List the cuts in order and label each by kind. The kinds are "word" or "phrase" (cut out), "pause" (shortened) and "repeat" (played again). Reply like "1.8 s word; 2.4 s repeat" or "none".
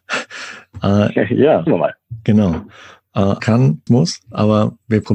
1.7 s word; 3.4 s word; 3.9 s word